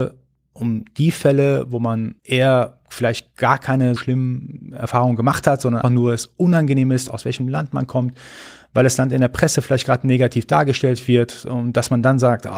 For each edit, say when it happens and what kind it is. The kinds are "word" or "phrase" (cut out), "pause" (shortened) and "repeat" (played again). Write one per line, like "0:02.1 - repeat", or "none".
0:02.2 - pause
0:04.0 - word
0:05.8 - word